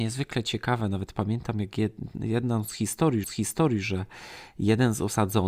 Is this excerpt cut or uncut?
cut